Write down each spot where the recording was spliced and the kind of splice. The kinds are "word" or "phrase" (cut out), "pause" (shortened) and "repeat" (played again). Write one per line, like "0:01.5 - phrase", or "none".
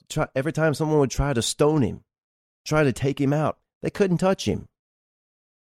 none

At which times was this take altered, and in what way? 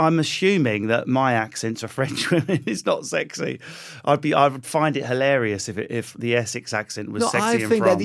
none

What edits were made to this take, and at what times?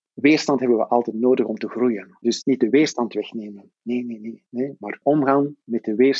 0:02.4 - word
0:04.5 - pause
0:05.0 - word

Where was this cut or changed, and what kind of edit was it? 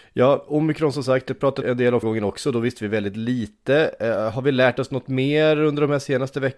0:01.6 - word
0:02.0 - word

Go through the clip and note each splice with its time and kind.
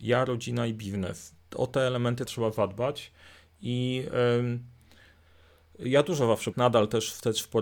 0:01.4 - pause
0:02.3 - word
0:06.5 - word

